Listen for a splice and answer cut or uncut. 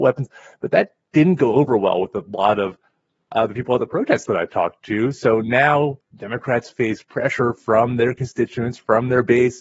uncut